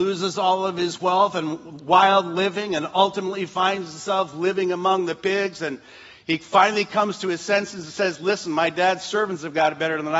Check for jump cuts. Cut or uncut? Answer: uncut